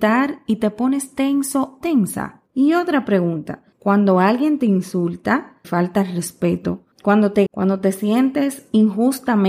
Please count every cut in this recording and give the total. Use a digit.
6